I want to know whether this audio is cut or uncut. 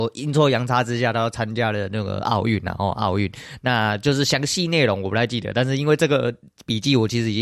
uncut